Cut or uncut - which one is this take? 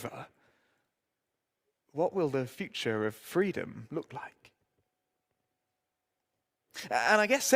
uncut